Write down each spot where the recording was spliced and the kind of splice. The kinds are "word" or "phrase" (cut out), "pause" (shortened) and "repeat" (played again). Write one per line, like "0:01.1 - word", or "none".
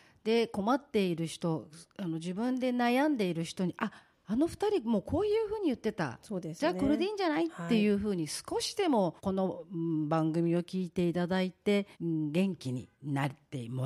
0:04.1 - pause
0:09.2 - pause
0:11.9 - pause
0:12.9 - pause

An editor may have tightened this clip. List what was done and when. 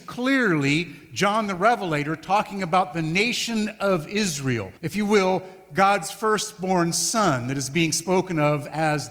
0:04.8 - pause

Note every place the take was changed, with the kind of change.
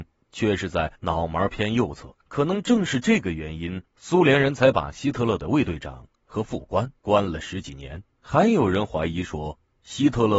0:01.0 - pause
0:02.2 - pause
0:03.9 - pause
0:07.0 - pause
0:08.1 - pause

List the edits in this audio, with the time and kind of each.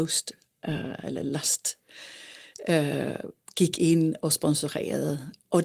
none

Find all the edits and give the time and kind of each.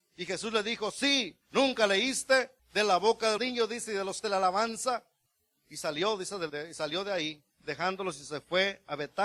0:01.4 - pause
0:02.6 - pause
0:03.4 - word
0:04.2 - phrase
0:05.3 - pause
0:06.5 - word
0:07.5 - pause

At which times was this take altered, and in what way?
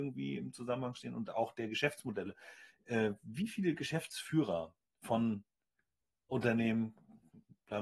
none

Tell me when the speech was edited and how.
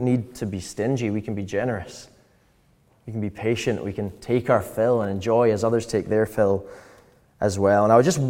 none

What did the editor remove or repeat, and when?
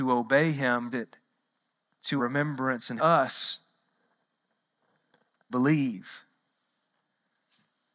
0:00.9 - word
0:02.2 - word
0:03.0 - word
0:05.5 - word

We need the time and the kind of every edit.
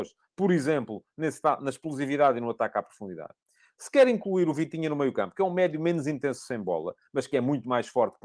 none

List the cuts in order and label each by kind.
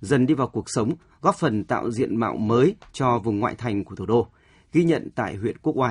none

